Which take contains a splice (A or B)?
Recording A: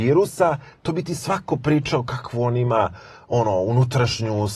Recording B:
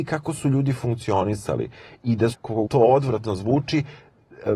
B